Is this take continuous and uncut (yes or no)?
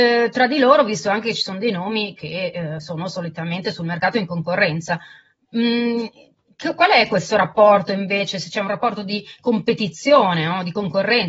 yes